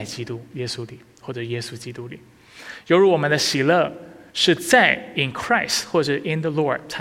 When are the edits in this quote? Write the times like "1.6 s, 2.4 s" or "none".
4.3 s